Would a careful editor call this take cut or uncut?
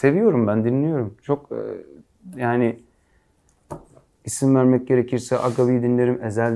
uncut